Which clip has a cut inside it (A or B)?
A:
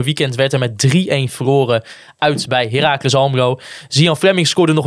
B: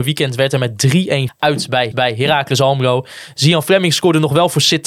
B